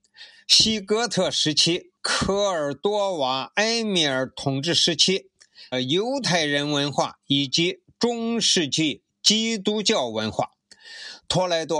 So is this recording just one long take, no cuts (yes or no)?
no